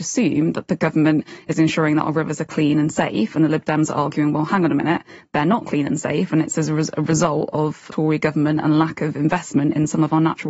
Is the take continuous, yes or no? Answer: yes